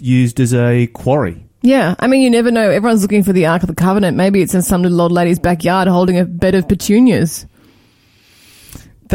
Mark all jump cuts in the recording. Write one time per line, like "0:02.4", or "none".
none